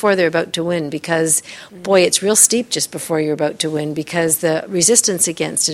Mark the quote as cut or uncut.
uncut